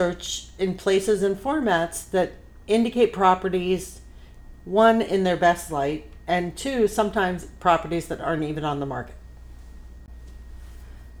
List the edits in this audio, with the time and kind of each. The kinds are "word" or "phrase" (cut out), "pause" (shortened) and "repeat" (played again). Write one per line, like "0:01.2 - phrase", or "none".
none